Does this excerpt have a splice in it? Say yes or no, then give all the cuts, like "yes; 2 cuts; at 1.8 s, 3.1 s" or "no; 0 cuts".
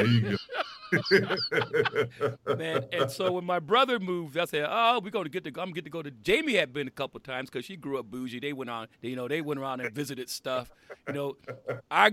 yes; 1 cut; at 8.9 s